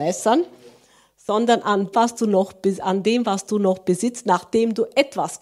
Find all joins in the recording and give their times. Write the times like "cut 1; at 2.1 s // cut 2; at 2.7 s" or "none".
cut 1; at 1.9 s

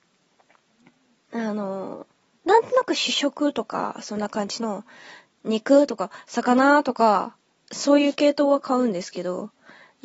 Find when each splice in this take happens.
none

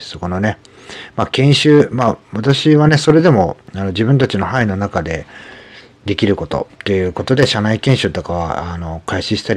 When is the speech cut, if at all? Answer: cut 1; at 2.2 s // cut 2; at 6.7 s

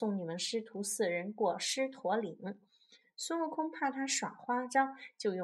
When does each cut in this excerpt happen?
none

